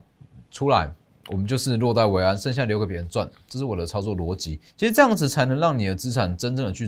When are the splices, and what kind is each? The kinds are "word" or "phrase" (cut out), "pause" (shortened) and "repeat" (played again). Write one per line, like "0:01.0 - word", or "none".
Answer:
0:04.7 - pause